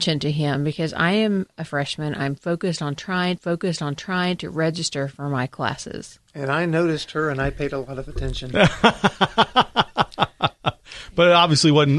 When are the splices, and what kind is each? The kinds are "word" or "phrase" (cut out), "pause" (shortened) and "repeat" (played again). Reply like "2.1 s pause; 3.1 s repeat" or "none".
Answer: 3.4 s repeat; 6.3 s pause